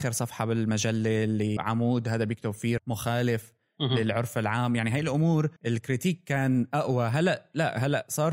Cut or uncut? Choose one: cut